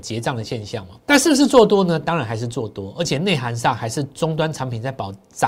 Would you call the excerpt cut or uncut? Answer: cut